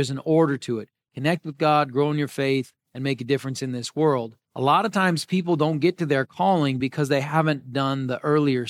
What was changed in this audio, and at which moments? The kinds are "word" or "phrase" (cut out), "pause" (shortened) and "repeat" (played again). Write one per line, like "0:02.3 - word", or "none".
none